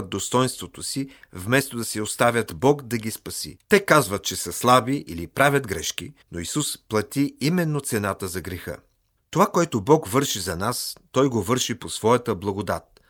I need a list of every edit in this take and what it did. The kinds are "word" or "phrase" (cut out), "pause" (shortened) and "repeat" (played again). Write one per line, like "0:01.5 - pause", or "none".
0:03.6 - pause
0:06.2 - pause
0:09.2 - pause